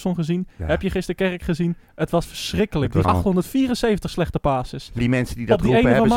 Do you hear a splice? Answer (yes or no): yes